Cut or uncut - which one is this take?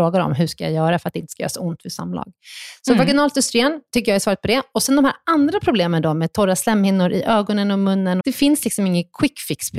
cut